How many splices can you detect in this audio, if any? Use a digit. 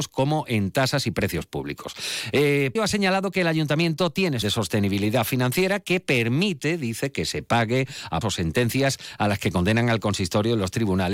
3